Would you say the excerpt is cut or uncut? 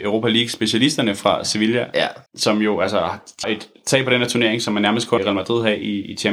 cut